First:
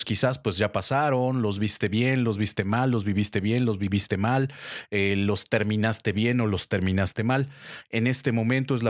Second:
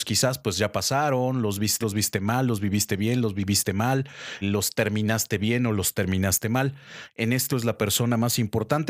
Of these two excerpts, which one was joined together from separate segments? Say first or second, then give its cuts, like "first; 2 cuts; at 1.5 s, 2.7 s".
second; 3 cuts; at 1.8 s, 4.4 s, 7.5 s